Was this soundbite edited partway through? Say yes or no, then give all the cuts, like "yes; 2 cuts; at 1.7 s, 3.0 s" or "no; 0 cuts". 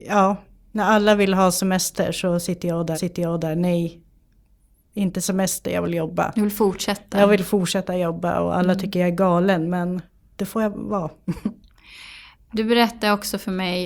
yes; 2 cuts; at 2.9 s, 11.6 s